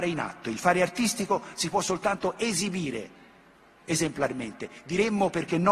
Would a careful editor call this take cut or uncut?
uncut